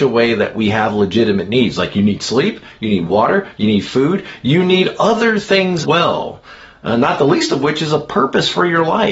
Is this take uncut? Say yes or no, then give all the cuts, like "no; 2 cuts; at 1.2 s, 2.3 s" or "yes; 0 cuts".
no; 1 cut; at 5.8 s